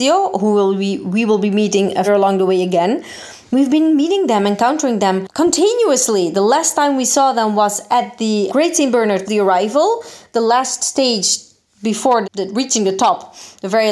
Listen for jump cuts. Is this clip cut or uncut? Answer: cut